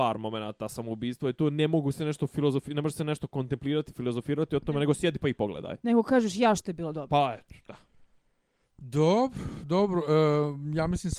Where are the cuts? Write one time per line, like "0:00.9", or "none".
none